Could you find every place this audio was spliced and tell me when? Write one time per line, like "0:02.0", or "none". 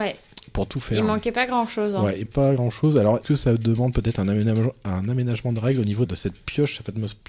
0:02.3
0:03.2
0:06.1